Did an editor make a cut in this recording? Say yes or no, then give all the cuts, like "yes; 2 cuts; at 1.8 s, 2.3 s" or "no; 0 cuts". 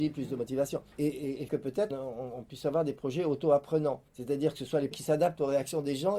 yes; 5 cuts; at 0.9 s, 1.5 s, 1.9 s, 4.1 s, 4.9 s